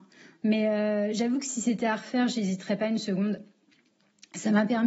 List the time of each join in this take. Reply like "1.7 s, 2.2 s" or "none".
none